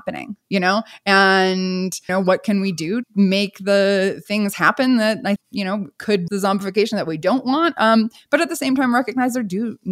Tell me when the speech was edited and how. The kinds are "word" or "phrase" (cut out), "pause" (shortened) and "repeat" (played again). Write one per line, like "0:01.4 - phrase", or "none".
0:02.1 - word
0:03.0 - word
0:05.4 - word
0:06.3 - word